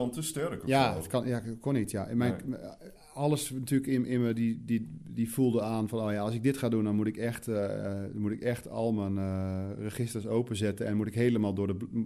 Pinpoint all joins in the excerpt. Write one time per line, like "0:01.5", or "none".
0:03.0